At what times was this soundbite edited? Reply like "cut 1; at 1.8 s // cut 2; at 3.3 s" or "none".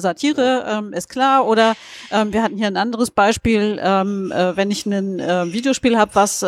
none